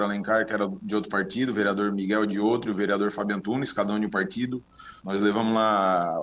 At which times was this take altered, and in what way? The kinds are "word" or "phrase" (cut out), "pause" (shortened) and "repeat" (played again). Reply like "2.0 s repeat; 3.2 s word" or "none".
5.0 s pause